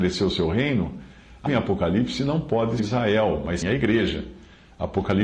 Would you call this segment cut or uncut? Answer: cut